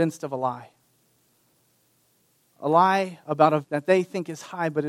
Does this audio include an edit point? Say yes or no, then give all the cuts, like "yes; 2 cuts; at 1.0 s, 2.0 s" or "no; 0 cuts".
yes; 1 cut; at 3.6 s